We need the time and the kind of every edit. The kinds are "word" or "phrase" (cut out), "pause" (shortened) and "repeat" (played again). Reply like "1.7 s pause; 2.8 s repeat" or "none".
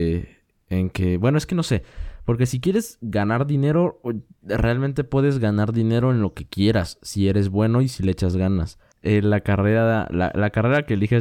none